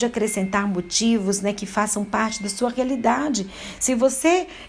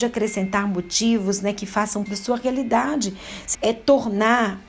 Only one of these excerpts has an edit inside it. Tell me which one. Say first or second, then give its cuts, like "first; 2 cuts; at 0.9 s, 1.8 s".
second; 2 cuts; at 2.1 s, 3.5 s